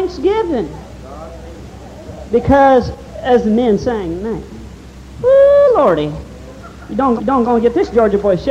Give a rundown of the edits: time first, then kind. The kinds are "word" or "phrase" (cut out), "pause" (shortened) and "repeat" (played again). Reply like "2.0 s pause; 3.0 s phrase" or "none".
7.2 s repeat